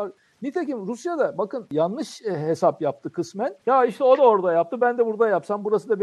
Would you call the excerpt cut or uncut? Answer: uncut